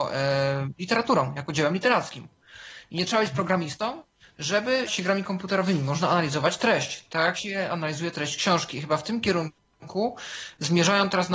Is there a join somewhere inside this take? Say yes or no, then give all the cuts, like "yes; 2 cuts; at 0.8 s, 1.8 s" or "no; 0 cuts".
yes; 1 cut; at 4.9 s